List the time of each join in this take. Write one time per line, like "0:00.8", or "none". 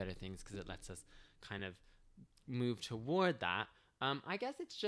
none